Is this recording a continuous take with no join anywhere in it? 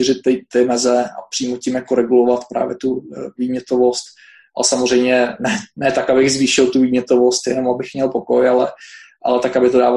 yes; 0 cuts

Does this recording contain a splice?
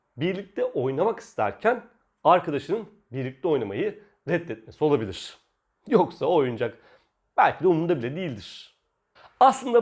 no; 0 cuts

